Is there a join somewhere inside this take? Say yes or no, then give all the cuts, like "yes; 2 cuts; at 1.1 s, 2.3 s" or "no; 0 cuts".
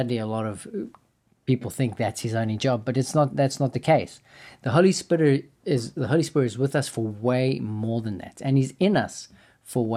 no; 0 cuts